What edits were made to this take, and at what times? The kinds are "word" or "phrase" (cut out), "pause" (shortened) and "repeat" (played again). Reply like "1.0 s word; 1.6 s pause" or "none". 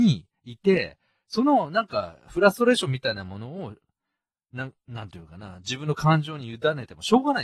none